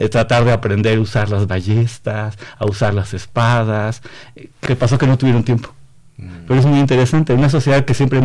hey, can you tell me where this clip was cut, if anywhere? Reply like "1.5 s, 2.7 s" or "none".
4.7 s